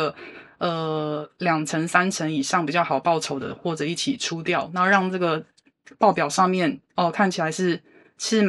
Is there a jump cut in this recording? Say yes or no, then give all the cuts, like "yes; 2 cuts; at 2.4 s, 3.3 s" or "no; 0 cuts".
no; 0 cuts